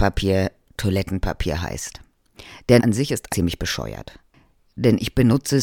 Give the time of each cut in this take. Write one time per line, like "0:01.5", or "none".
0:02.8
0:03.3